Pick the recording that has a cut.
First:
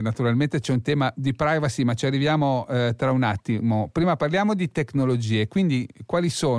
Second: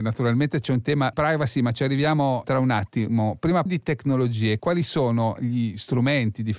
second; 4 cuts; at 1.1 s, 2.4 s, 3.7 s, 4.6 s

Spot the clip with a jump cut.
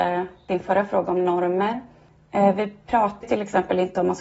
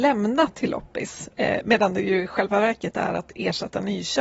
first; 1 cut; at 3.2 s

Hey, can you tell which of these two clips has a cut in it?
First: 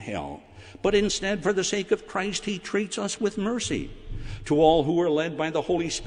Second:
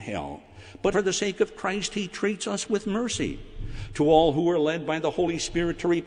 second; 1 cut; at 0.9 s

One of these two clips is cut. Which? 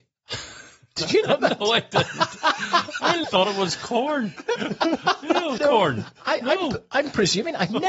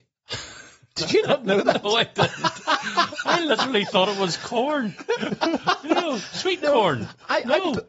first; 3 cuts; at 1.4 s, 3.2 s, 5.6 s

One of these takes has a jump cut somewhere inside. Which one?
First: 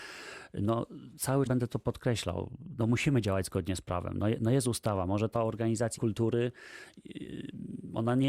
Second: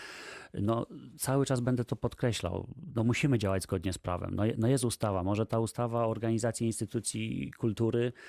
first; 3 cuts; at 1.5 s, 5.3 s, 6.0 s

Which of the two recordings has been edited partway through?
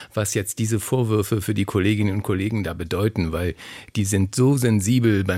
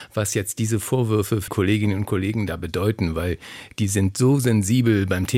second; 1 cut; at 1.5 s

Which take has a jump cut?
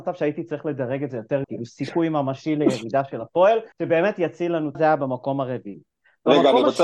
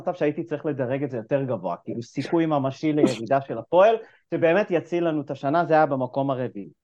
first; 3 cuts; at 1.4 s, 3.7 s, 4.7 s

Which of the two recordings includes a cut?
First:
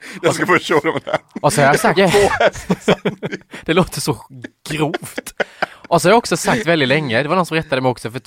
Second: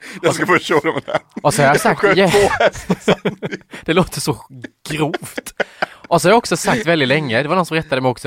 first; 1 cut; at 2.0 s

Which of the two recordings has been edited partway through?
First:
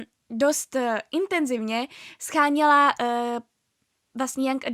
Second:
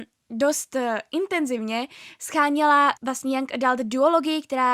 second; 1 cut; at 3.0 s

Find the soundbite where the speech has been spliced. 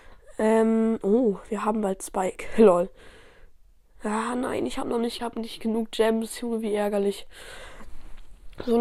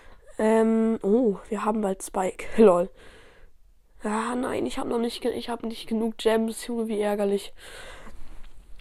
first; 1 cut; at 5.2 s

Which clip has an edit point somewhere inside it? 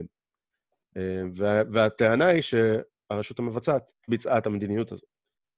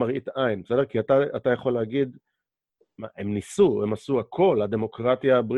first; 1 cut; at 4.1 s

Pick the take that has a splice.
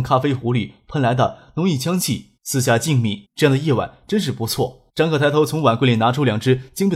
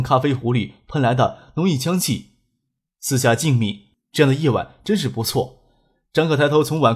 first; 3 cuts; at 2.4 s, 3.2 s, 4.9 s

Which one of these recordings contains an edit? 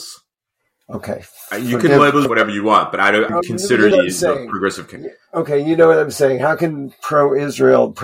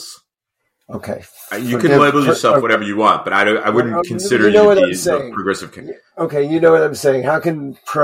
first; 3 cuts; at 2.3 s, 3.3 s, 3.9 s

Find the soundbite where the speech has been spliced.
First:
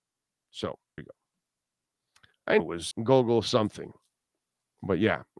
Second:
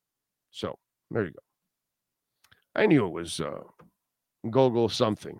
first; 3 cuts; at 1.0 s, 2.6 s, 2.9 s

